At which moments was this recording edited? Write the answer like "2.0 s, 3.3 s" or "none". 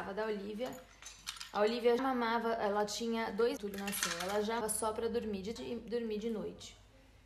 2.0 s, 3.6 s, 4.6 s, 5.6 s